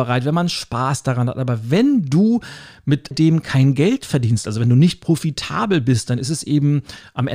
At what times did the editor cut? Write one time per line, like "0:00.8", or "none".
0:03.1